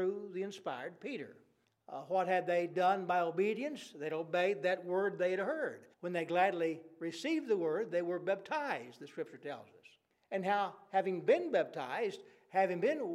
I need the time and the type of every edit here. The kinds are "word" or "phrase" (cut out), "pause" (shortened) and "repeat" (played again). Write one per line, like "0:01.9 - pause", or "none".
0:01.6 - pause
0:05.9 - pause
0:10.1 - pause